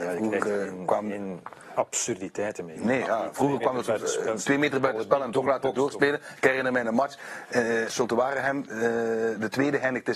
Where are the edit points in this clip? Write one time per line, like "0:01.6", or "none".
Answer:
0:07.9